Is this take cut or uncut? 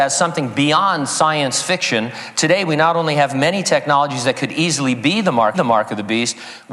cut